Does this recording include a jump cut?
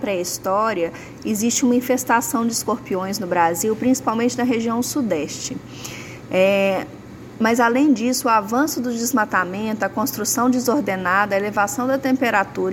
no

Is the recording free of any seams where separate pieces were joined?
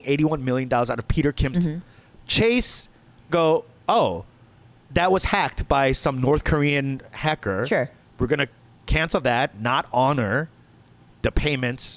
no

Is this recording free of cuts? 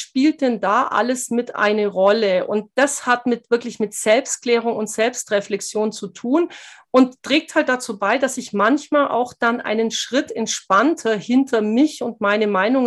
yes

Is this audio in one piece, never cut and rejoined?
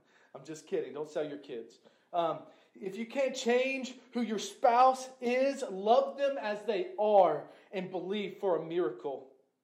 yes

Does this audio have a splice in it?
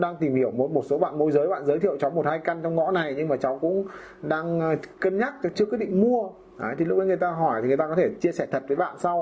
yes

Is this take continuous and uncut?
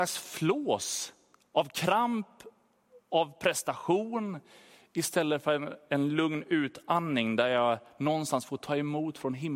yes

